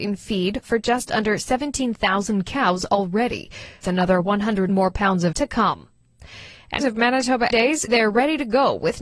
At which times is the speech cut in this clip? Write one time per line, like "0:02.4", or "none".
0:03.8
0:04.7
0:05.3
0:06.8
0:07.5
0:07.9